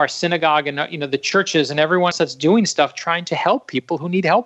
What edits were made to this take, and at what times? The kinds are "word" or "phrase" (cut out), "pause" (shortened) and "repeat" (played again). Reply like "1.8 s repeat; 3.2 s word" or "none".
2.1 s word

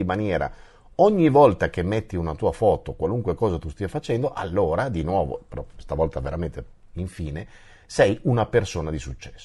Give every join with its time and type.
none

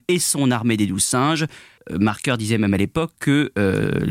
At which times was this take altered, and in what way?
none

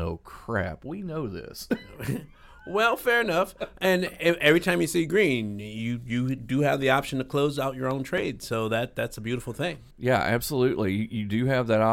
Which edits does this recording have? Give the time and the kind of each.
9.9 s pause

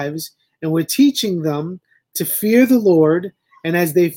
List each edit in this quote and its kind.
none

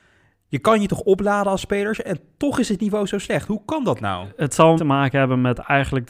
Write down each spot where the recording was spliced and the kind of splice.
4.8 s word

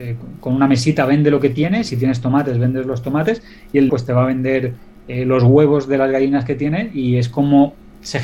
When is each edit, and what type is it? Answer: 3.9 s phrase

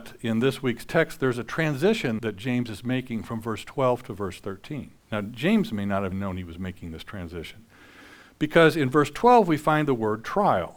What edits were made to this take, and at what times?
2.2 s word; 5.0 s pause; 6.1 s word

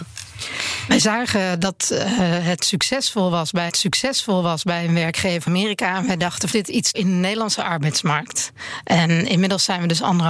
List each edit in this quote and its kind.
3.7 s repeat; 5.5 s word; 6.5 s phrase; 6.9 s word

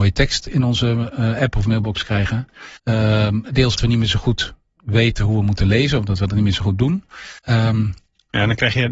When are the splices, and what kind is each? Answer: 2.8 s pause; 3.8 s word; 7.4 s pause

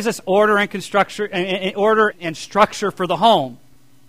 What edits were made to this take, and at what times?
2.1 s word

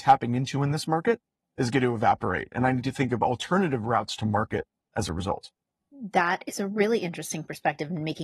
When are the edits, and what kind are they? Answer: none

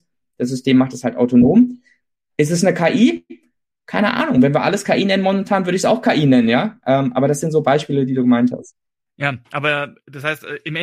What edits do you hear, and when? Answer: none

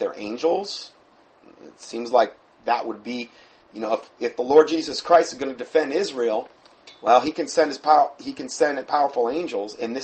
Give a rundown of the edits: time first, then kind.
none

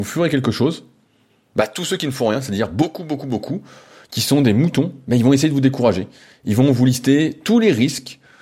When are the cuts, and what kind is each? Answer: none

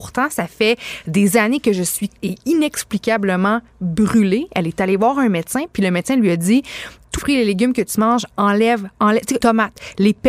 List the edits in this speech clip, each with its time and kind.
2.2 s word; 7.2 s word; 9.4 s word

